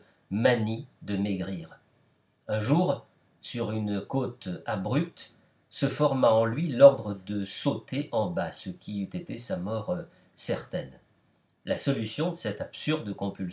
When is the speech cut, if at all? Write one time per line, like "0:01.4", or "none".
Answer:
none

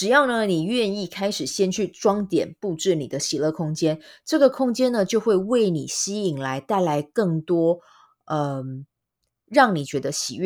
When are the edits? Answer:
none

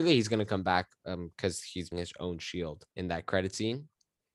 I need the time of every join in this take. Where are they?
0:01.9
0:02.9

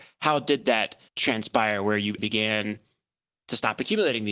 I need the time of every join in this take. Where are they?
0:01.1
0:02.2

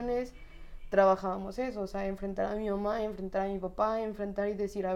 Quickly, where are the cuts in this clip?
none

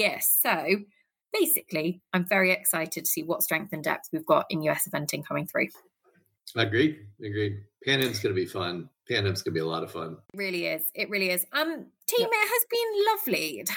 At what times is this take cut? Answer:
0:10.2

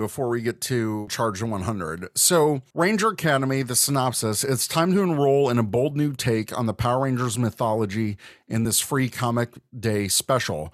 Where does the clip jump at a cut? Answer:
none

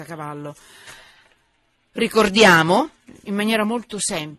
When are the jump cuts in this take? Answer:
0:03.3

